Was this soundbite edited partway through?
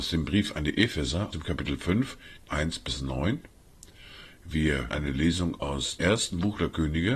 yes; 4 cuts; at 1.3 s, 2.5 s, 4.9 s, 6.0 s

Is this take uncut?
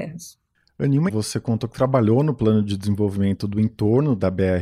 no; 1 cut; at 1.1 s

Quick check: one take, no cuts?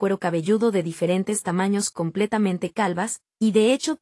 yes; 0 cuts

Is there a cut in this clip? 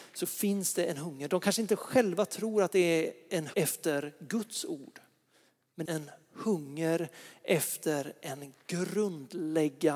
yes; 2 cuts; at 3.5 s, 5.8 s

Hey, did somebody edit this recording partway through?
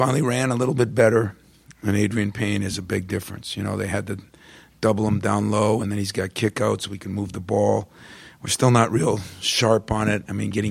no; 0 cuts

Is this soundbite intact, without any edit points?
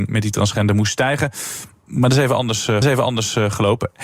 no; 1 cut; at 2.8 s

